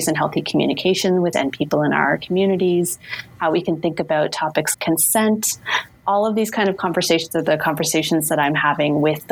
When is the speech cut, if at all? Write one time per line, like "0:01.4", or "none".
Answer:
0:01.3
0:04.7